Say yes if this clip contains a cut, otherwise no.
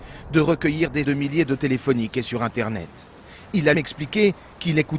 yes